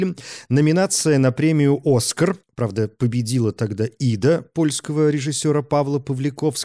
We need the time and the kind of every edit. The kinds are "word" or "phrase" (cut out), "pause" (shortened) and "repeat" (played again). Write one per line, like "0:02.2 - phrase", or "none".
0:02.4 - pause